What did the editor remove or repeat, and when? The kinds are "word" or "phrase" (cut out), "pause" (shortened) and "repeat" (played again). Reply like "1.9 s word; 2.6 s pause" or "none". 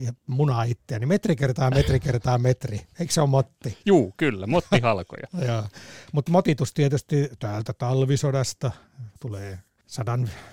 9.2 s pause